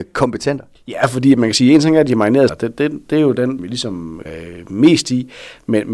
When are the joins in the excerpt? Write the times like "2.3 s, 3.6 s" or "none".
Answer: 2.5 s, 3.6 s, 4.2 s